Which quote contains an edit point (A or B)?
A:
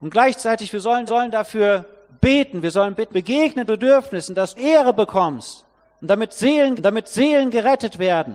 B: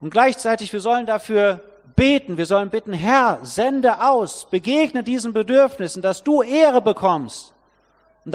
A